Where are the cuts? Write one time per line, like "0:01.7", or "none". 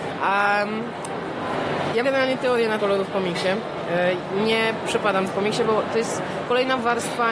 0:02.0
0:02.8
0:05.3